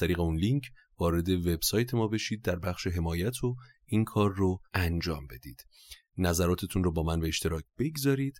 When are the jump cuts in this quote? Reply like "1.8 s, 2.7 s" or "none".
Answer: 4.7 s